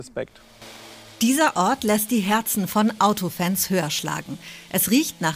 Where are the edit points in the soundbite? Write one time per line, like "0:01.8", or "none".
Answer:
none